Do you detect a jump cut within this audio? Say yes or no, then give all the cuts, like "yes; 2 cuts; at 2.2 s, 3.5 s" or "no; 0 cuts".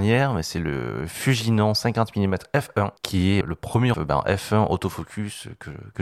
yes; 3 cuts; at 3.0 s, 3.4 s, 3.9 s